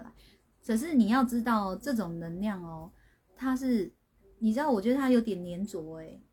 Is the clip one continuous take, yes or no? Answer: yes